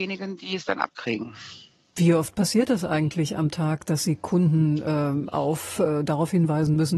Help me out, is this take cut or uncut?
uncut